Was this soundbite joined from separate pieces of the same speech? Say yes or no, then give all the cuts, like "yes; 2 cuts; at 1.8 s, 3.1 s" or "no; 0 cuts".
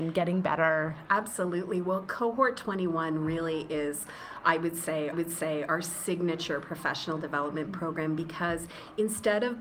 yes; 1 cut; at 5.1 s